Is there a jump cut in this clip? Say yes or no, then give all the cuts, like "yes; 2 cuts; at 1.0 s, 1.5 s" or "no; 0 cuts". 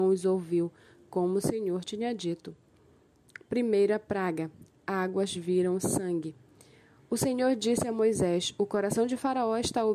no; 0 cuts